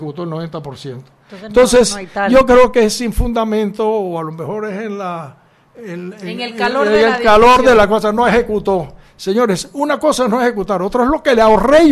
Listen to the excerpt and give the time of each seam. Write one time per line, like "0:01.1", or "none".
none